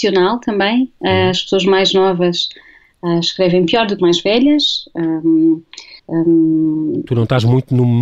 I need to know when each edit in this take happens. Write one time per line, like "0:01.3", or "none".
0:04.0
0:06.0